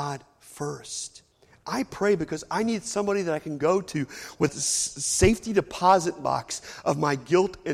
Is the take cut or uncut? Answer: cut